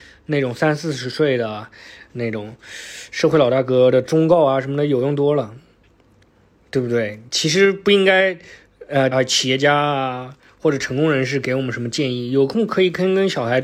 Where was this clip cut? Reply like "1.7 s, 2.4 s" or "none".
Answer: 7.3 s, 9.1 s

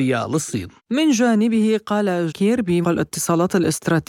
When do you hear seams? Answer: 2.3 s, 2.8 s

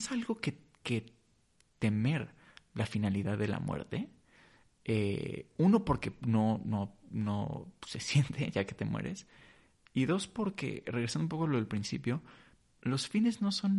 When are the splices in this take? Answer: none

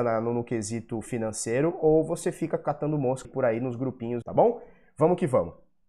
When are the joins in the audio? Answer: 3.2 s, 4.2 s

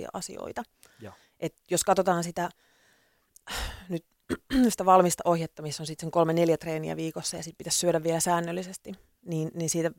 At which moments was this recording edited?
none

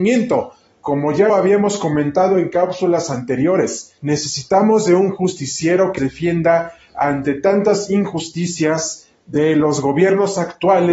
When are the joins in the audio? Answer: 1.3 s, 4.0 s, 6.0 s

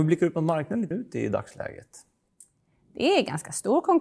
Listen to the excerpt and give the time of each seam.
0.9 s

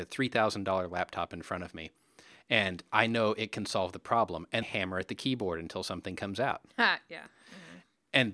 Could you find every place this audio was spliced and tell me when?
4.6 s

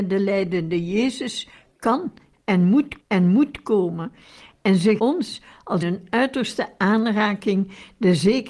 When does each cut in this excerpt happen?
3.0 s, 5.0 s, 5.8 s

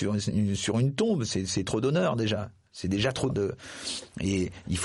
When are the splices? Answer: 3.3 s

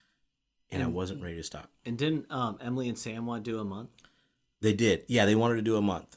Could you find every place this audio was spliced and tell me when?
none

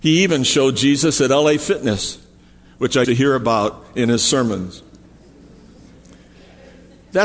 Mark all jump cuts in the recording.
3.0 s

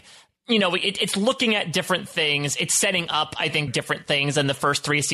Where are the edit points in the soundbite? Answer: 3.7 s

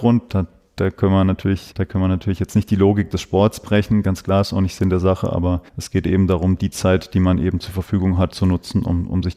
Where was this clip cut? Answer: 1.7 s, 5.7 s, 8.3 s

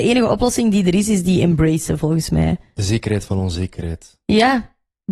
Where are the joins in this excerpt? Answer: none

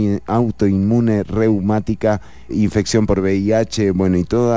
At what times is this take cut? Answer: 2.5 s

